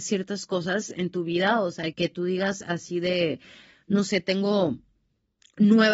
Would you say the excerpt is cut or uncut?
cut